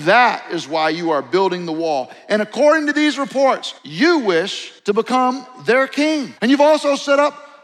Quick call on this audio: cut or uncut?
cut